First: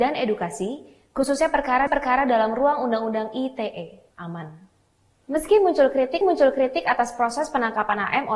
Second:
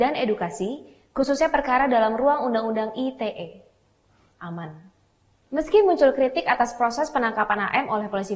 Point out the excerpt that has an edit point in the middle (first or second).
first